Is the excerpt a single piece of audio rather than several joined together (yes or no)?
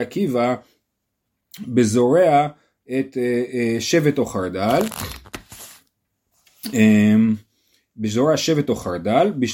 yes